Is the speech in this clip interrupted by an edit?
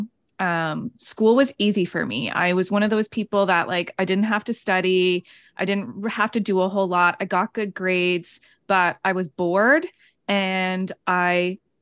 no; 0 cuts

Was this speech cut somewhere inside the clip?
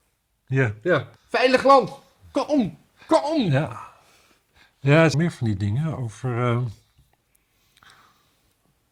yes; 2 cuts; at 1.2 s, 5.1 s

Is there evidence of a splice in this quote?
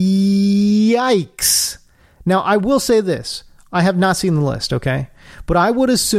no; 0 cuts

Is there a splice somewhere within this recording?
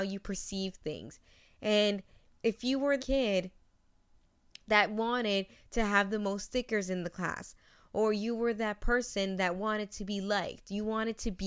yes; 1 cut; at 3.0 s

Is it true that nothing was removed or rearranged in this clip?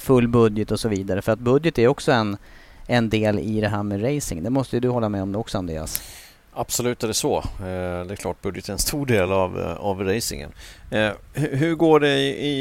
yes; 0 cuts

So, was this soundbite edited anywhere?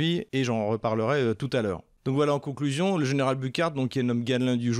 no; 0 cuts

